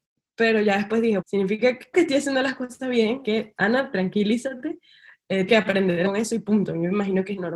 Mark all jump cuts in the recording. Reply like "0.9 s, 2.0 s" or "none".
1.2 s, 1.9 s, 3.2 s, 5.5 s, 6.0 s